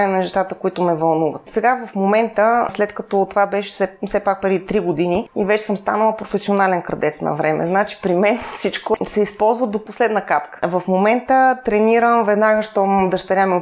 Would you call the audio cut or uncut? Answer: uncut